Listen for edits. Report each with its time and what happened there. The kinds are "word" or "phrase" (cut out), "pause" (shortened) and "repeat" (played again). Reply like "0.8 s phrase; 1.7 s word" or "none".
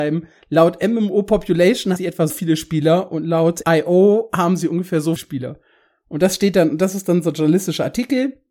2.0 s word; 2.3 s word; 3.6 s word; 5.2 s word